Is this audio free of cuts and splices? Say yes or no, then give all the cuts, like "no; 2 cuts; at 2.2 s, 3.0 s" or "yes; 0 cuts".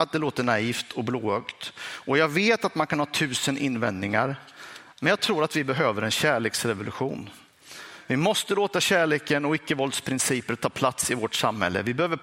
yes; 0 cuts